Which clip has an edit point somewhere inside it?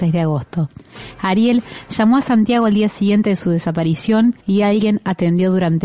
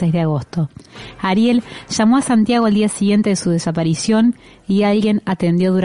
first; 1 cut; at 4.4 s

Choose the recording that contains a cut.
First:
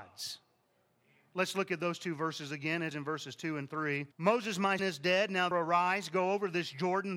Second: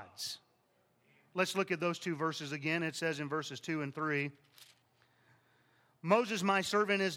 first; 4 cuts; at 2.9 s, 4.1 s, 4.8 s, 5.5 s

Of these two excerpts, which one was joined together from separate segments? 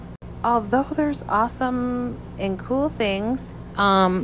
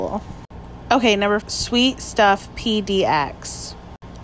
second; 1 cut; at 1.4 s

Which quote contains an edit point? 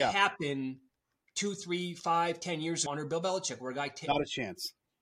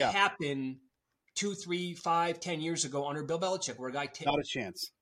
first; 1 cut; at 2.9 s

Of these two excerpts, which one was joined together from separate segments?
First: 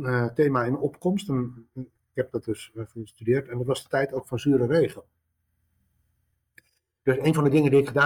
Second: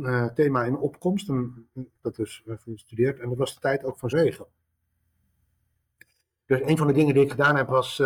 second; 2 cuts; at 2.0 s, 4.1 s

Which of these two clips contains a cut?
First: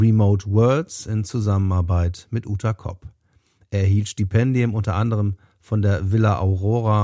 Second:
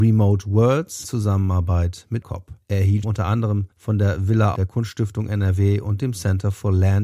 second; 6 cuts; at 1.0 s, 2.2 s, 2.6 s, 3.0 s, 3.7 s, 4.5 s

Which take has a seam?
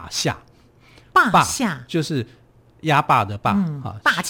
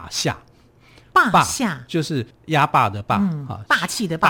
second; 1 cut; at 2.3 s

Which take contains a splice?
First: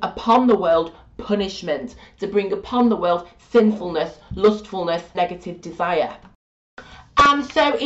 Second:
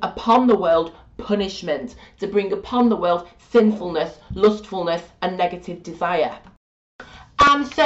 first; 1 cut; at 5.1 s

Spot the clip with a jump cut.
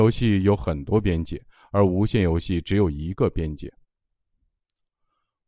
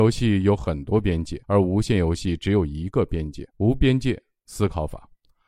second; 2 cuts; at 1.4 s, 3.5 s

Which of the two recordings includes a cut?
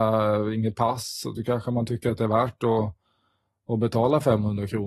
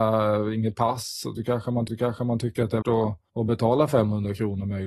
second; 3 cuts; at 1.9 s, 2.8 s, 3.3 s

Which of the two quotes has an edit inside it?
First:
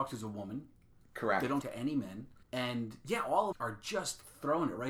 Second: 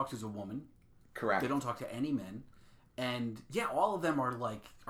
first; 3 cuts; at 1.6 s, 2.4 s, 3.5 s

